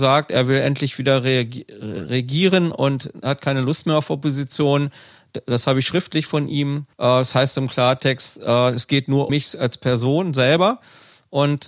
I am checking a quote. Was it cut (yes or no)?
yes